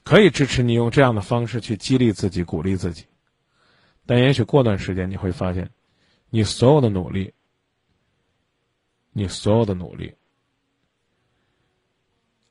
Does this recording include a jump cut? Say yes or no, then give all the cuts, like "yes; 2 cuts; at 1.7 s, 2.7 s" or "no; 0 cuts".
no; 0 cuts